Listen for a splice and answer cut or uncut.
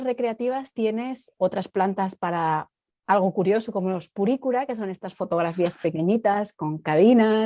uncut